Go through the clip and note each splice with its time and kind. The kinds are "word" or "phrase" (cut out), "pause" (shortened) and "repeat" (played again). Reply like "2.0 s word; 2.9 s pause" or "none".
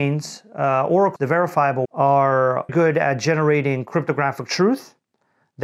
1.2 s word; 1.8 s word; 2.7 s word